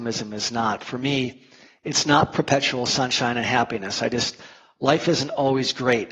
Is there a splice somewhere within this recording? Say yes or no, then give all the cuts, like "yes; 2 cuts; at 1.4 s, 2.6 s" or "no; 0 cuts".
no; 0 cuts